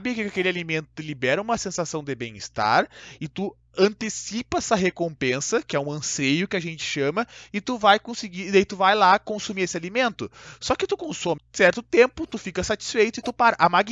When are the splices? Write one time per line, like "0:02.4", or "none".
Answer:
0:11.4